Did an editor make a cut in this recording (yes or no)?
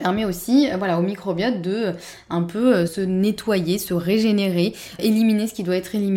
yes